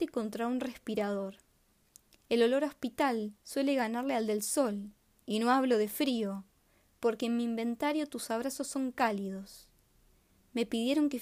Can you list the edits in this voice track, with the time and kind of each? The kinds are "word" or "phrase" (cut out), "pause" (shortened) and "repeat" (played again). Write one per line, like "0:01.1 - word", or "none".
0:03.4 - pause